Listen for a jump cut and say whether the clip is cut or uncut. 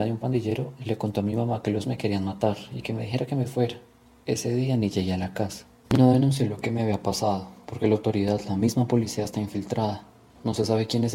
cut